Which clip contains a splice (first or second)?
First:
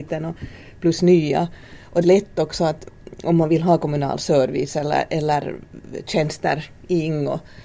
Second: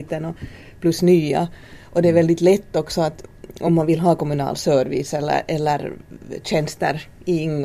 first